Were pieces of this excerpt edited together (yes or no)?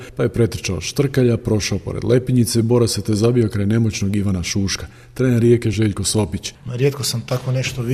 no